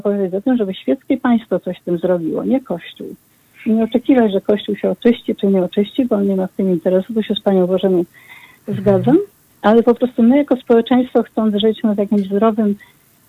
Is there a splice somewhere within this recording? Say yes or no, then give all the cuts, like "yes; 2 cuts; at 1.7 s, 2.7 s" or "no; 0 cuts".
no; 0 cuts